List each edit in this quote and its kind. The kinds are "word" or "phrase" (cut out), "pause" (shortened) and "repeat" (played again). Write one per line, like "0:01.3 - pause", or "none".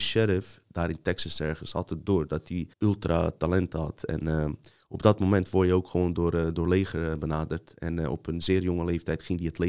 0:02.7 - pause